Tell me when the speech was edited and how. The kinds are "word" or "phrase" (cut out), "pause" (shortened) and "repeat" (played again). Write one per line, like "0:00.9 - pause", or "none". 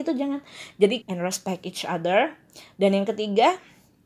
0:01.0 - phrase